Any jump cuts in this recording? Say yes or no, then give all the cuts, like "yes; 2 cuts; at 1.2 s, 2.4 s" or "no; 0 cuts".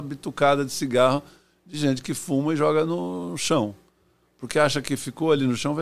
no; 0 cuts